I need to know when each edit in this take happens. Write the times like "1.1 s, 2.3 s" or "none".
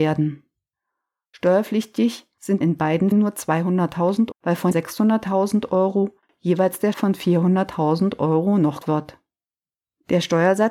2.6 s, 3.1 s, 4.3 s, 4.7 s, 6.9 s, 8.8 s